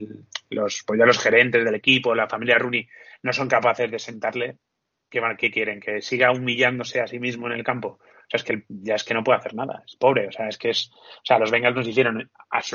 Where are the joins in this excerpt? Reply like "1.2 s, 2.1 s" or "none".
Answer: none